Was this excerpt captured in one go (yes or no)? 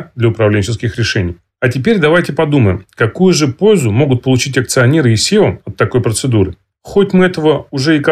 yes